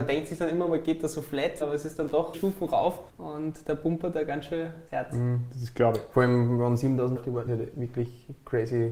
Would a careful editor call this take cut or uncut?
cut